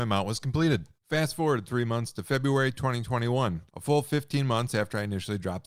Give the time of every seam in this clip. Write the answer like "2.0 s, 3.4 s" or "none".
1.0 s, 3.7 s